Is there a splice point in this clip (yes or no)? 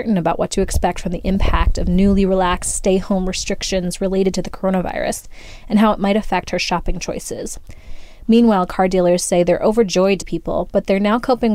yes